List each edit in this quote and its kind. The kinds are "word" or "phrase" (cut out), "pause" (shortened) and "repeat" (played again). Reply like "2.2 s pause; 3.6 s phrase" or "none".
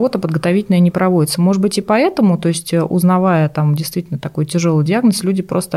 none